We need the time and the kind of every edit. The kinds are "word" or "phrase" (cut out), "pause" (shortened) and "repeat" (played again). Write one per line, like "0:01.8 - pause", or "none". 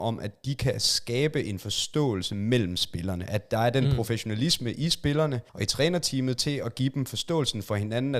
0:05.5 - pause